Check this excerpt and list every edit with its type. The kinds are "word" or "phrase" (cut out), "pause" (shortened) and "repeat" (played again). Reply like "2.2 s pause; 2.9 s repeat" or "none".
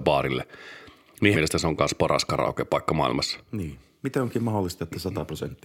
1.3 s word